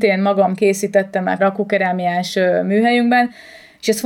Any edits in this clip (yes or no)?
yes